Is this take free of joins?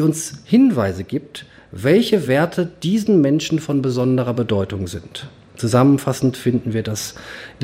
yes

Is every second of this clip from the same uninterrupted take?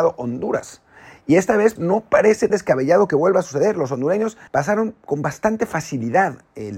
no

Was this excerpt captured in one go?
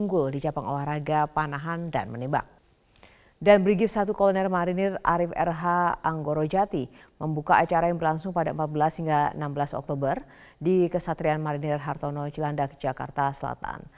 yes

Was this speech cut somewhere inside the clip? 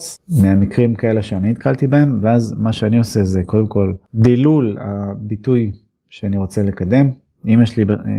no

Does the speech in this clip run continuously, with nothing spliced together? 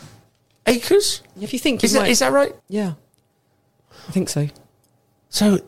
no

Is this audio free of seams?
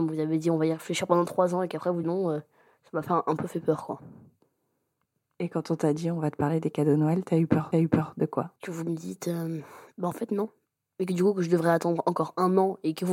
no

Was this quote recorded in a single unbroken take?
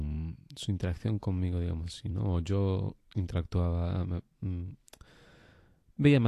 yes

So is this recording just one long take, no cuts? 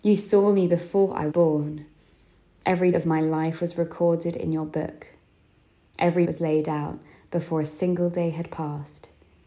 no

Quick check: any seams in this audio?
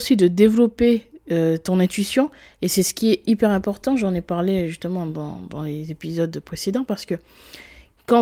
no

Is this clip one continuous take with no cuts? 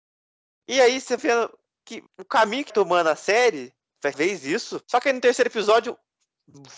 no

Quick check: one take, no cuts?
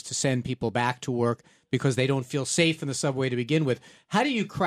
yes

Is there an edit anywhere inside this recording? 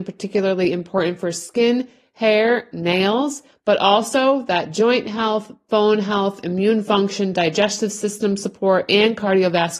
no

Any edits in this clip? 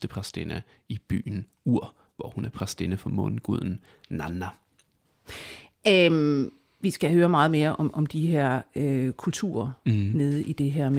no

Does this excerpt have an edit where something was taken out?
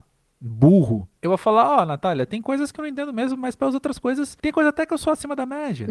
yes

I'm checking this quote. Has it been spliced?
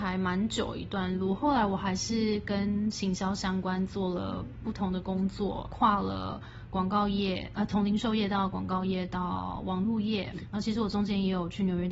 yes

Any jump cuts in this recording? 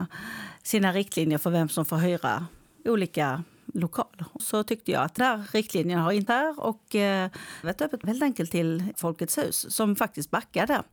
yes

